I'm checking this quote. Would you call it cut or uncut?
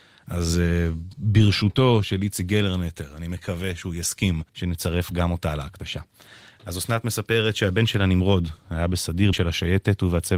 cut